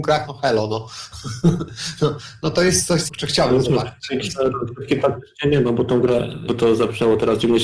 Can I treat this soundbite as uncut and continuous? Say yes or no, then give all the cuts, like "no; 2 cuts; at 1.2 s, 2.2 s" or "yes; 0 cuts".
no; 2 cuts; at 3.1 s, 6.5 s